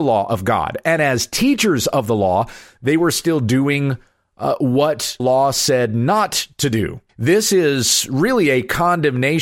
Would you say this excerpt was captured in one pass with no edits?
no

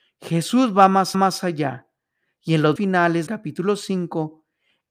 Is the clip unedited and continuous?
no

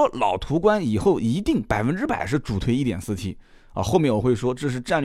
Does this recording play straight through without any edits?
yes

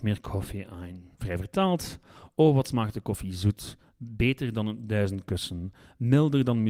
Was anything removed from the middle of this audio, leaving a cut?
yes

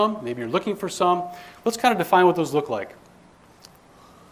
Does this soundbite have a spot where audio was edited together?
no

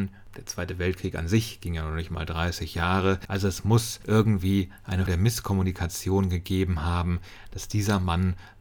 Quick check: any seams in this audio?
yes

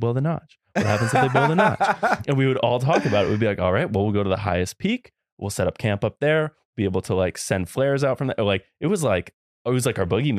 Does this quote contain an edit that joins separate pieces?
no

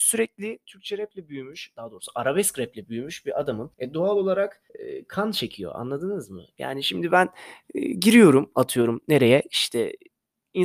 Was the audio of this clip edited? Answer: yes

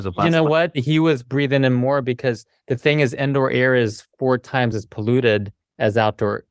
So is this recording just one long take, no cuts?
yes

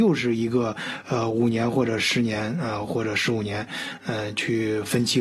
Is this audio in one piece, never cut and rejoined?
yes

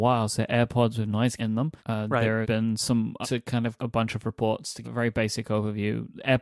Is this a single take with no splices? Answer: no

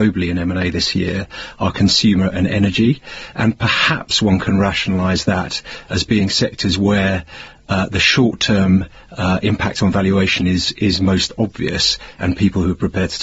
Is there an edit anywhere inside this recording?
no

